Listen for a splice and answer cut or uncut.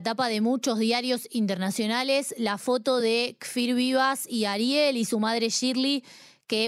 uncut